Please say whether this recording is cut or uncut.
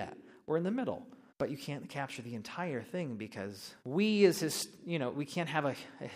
cut